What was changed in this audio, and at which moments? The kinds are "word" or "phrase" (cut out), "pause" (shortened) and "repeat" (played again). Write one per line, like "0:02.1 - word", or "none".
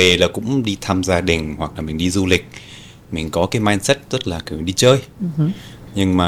none

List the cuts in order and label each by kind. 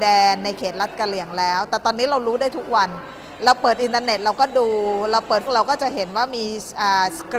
0:05.5 - word

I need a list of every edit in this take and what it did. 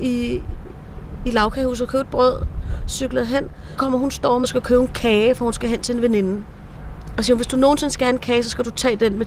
0:03.8 - word

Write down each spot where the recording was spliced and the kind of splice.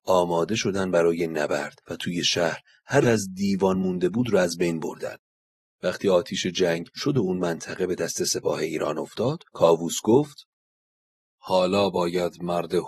0:01.8 - pause
0:03.0 - word
0:07.0 - word
0:09.5 - pause

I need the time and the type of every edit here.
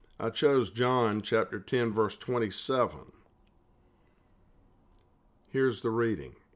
none

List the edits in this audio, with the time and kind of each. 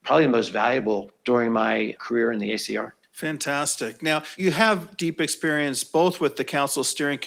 none

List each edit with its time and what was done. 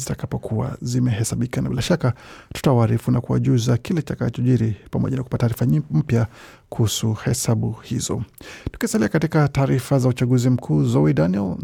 none

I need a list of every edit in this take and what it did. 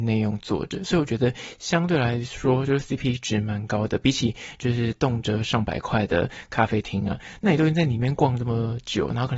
none

